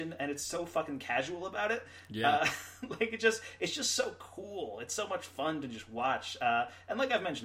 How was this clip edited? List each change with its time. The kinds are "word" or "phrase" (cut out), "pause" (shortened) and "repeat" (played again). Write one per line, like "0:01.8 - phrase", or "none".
none